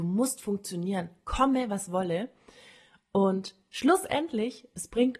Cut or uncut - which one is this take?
uncut